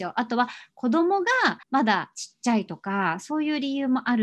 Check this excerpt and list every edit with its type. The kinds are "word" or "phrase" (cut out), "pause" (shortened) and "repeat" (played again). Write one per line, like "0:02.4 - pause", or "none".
0:01.6 - pause